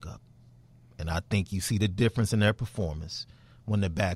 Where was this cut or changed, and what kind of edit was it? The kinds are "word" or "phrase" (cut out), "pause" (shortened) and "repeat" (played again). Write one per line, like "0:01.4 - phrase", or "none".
none

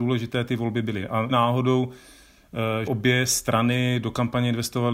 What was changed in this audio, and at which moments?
0:01.3 - word
0:02.8 - word

